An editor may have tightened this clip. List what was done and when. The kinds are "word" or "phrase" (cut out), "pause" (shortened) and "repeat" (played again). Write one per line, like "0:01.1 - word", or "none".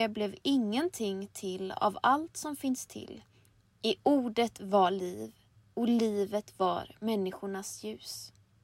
none

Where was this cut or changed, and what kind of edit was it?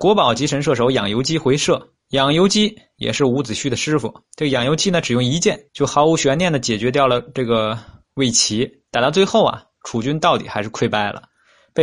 0:02.0 - pause
0:04.3 - pause
0:05.7 - pause
0:08.9 - pause

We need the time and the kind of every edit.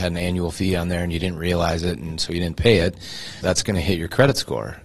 0:03.4 - word

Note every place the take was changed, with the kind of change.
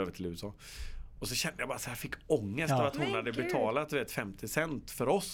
none

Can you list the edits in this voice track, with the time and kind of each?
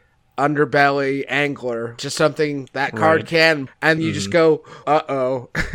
0:02.0 - word
0:02.7 - word
0:03.7 - word
0:04.0 - word
0:04.8 - word

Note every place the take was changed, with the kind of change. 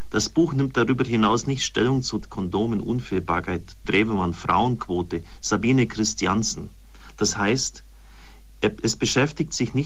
0:02.2 - word
0:03.8 - word

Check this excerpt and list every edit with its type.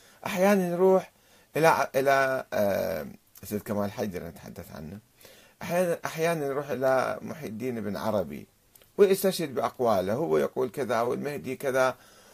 none

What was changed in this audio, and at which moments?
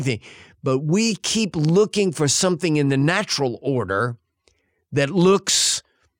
none

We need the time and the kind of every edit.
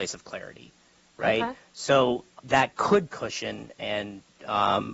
0:02.4 - word
0:03.1 - phrase

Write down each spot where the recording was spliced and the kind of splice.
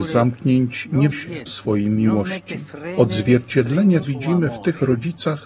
0:01.1 - word
0:01.5 - phrase
0:04.0 - word

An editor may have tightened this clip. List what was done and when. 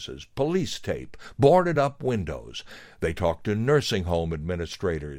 none

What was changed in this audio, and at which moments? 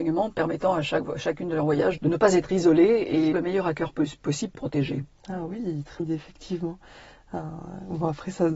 0:02.0 - word
0:03.3 - word
0:04.5 - word
0:06.0 - word

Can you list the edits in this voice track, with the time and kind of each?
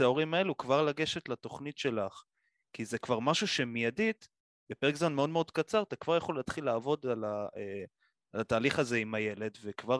none

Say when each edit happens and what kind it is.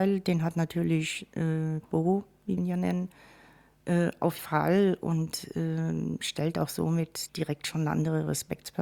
0:02.6 - word
0:04.4 - word
0:07.3 - word

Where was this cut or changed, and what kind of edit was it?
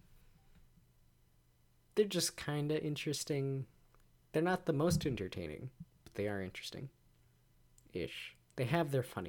none

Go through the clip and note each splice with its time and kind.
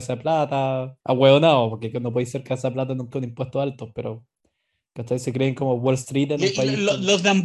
0:01.0 - pause
0:03.1 - word

